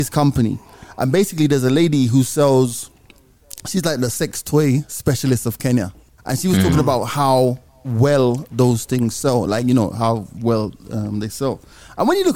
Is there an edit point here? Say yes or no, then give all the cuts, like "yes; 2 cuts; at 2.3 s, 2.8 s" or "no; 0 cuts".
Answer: no; 0 cuts